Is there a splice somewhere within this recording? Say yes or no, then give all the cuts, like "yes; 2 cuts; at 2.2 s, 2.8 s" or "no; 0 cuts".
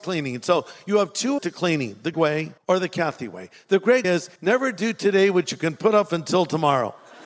yes; 5 cuts; at 1.4 s, 2.1 s, 2.6 s, 4.0 s, 4.4 s